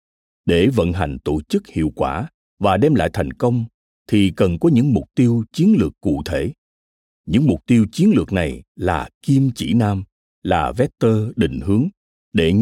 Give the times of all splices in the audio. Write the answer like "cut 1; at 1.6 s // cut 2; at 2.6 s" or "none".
none

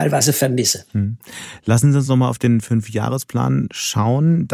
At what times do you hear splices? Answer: none

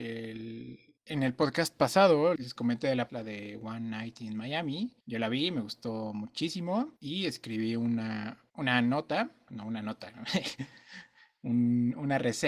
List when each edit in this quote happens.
cut 1; at 1.0 s // cut 2; at 2.4 s // cut 3; at 3.1 s // cut 4; at 5.0 s // cut 5; at 7.0 s // cut 6; at 8.5 s // cut 7; at 9.5 s

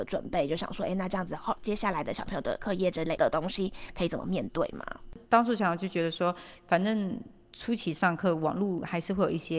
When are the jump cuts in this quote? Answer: cut 1; at 5.2 s

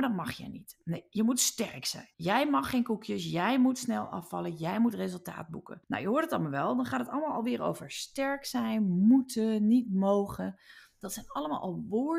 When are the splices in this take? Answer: cut 1; at 2.1 s // cut 2; at 5.8 s

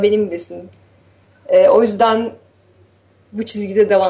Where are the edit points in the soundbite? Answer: none

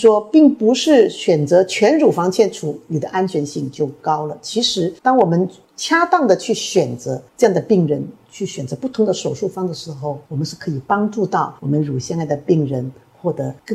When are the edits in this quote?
cut 1; at 5.0 s // cut 2; at 7.3 s // cut 3; at 10.3 s

